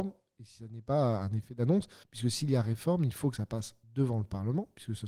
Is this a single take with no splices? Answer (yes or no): no